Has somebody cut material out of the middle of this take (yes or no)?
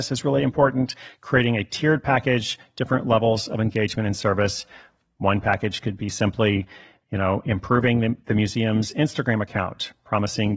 no